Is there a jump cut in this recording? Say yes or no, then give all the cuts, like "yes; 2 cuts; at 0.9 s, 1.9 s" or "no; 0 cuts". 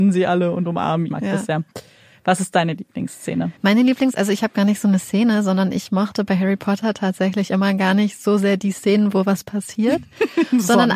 yes; 2 cuts; at 1.1 s, 3.6 s